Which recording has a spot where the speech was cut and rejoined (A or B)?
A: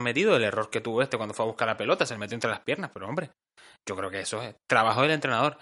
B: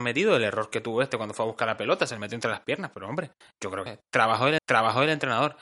B